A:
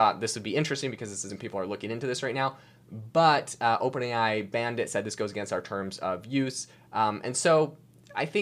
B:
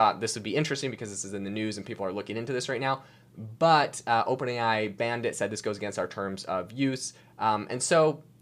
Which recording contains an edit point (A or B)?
A